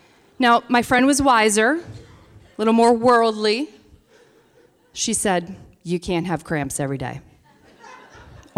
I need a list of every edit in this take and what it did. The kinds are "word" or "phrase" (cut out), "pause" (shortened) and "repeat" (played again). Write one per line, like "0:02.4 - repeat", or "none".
none